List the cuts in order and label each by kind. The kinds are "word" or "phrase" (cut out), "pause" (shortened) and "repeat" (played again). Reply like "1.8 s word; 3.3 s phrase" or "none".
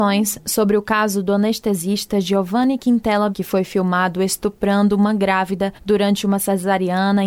3.3 s word; 5.8 s pause